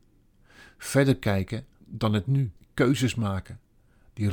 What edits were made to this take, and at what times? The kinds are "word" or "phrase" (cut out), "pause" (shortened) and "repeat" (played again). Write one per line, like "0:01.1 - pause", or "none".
0:01.7 - pause
0:02.6 - pause